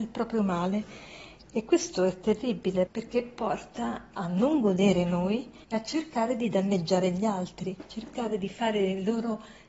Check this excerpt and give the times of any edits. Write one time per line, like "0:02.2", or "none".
0:02.9
0:05.6